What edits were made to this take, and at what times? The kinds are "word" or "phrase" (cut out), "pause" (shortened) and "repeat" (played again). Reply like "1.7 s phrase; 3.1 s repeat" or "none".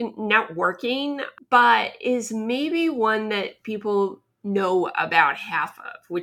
none